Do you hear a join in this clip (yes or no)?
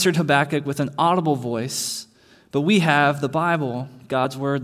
no